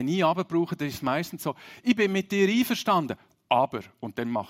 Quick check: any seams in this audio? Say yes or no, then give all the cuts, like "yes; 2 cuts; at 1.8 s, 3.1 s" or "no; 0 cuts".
no; 0 cuts